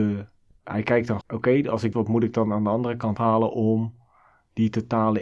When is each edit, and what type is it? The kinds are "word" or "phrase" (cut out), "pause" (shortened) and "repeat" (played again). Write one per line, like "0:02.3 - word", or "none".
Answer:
0:01.2 - word
0:01.9 - phrase
0:03.2 - word